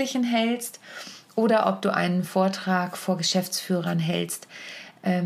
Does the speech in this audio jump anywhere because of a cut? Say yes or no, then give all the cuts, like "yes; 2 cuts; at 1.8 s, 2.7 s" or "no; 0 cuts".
no; 0 cuts